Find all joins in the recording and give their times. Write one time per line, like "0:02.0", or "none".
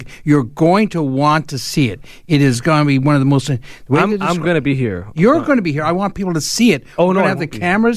none